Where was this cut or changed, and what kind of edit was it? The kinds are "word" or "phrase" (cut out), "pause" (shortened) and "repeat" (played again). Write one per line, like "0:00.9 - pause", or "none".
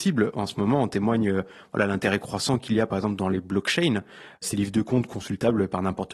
none